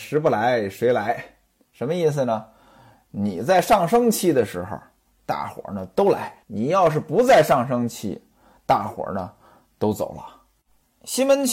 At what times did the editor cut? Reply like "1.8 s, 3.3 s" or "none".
6.4 s